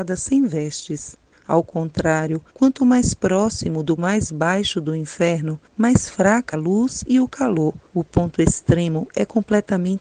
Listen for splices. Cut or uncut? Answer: cut